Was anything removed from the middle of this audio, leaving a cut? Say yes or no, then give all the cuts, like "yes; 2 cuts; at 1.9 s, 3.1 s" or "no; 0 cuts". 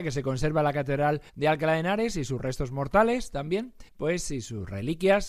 yes; 2 cuts; at 1.3 s, 3.9 s